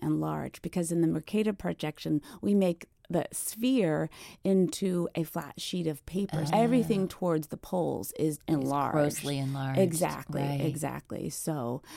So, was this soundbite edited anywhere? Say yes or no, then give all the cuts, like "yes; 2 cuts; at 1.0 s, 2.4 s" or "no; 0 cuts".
yes; 2 cuts; at 6.5 s, 8.4 s